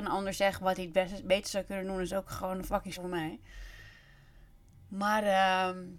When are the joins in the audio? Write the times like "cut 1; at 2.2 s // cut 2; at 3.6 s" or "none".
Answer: cut 1; at 3.0 s